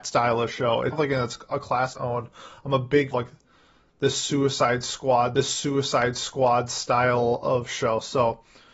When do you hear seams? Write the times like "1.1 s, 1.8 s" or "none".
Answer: 0.9 s, 1.9 s, 3.1 s, 5.3 s

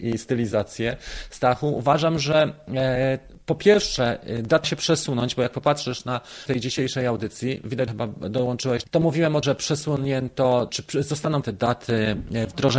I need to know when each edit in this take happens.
4.6 s, 6.5 s, 7.9 s, 8.8 s, 9.4 s, 10.7 s, 11.4 s

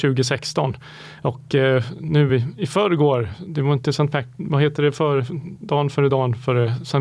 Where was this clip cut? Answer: none

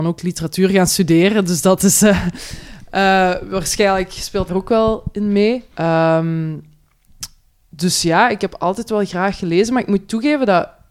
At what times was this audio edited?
4.5 s, 5.7 s

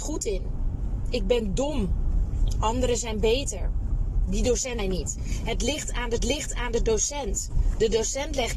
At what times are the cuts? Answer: 4.8 s, 6.2 s

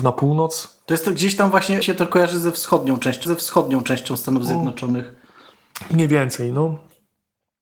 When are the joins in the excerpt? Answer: 1.8 s, 3.2 s

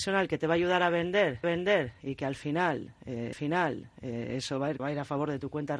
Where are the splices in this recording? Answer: 1.4 s, 3.3 s, 4.8 s

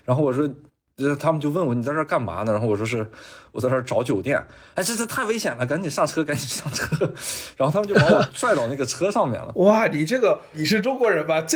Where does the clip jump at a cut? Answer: none

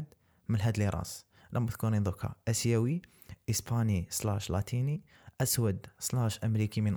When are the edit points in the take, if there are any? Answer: none

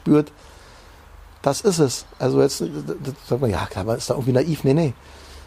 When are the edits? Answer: none

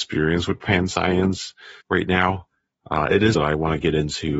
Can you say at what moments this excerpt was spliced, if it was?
1.8 s, 3.3 s

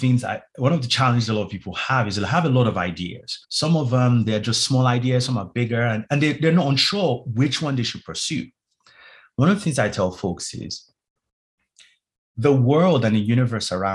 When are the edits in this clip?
3.4 s

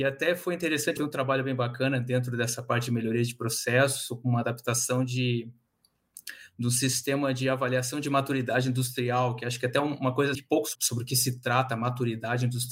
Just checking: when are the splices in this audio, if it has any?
1.0 s, 10.3 s, 10.7 s

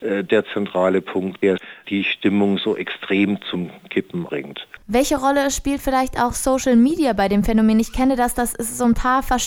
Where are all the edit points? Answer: 4.8 s

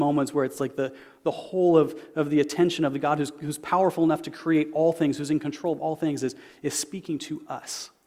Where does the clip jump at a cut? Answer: none

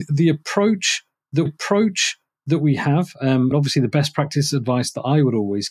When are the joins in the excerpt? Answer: 1.5 s, 3.5 s

